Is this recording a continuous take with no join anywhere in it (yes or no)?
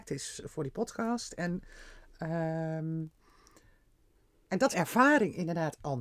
no